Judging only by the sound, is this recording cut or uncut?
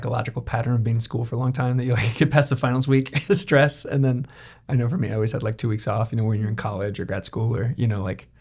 cut